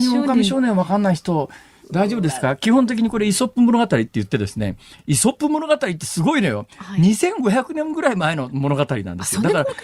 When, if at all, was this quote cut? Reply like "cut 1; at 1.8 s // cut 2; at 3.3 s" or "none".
none